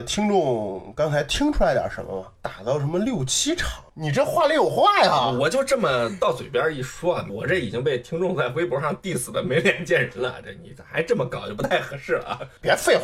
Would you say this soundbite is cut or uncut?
uncut